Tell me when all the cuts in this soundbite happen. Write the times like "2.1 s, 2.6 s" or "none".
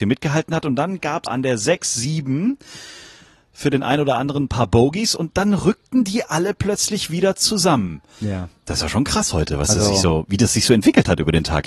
1.3 s